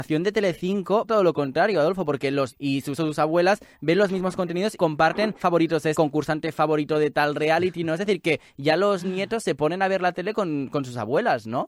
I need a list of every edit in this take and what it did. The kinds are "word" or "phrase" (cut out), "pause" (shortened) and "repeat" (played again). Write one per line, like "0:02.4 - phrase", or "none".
0:01.1 - word
0:02.5 - word
0:03.0 - word
0:04.8 - word
0:05.4 - word
0:05.9 - word